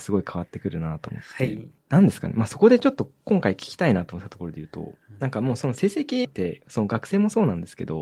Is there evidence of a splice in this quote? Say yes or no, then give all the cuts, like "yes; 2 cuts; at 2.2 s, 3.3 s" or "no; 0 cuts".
yes; 2 cuts; at 1.8 s, 6.2 s